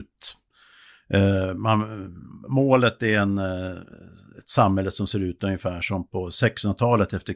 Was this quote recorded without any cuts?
yes; 0 cuts

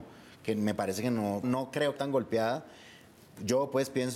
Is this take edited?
yes; 2 cuts; at 1.4 s, 2.0 s

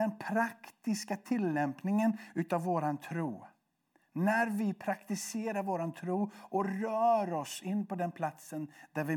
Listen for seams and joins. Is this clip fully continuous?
yes; 0 cuts

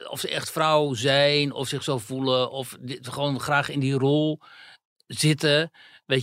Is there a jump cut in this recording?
no; 0 cuts

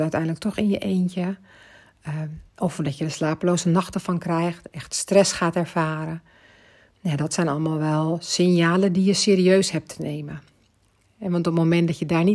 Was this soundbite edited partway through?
no; 0 cuts

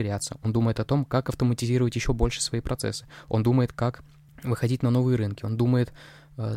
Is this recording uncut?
yes; 0 cuts

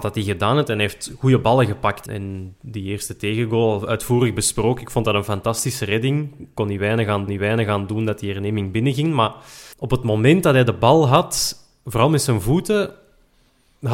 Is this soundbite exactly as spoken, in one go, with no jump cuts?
no; 3 cuts; at 2.1 s, 7.3 s, 9.7 s

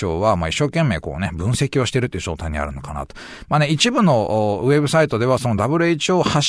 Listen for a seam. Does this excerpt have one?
no; 0 cuts

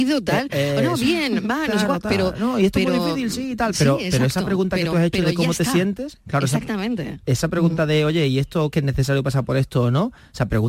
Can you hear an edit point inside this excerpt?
yes; 1 cut; at 8.7 s

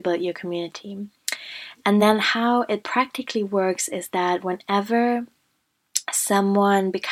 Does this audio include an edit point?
no; 0 cuts

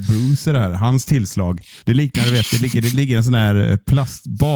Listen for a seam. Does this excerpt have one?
yes; 1 cut; at 1.8 s

